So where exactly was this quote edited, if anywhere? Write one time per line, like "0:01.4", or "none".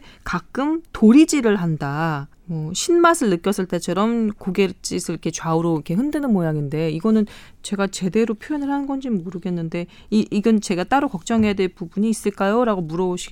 0:02.3